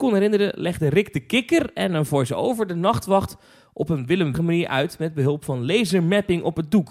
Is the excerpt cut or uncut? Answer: cut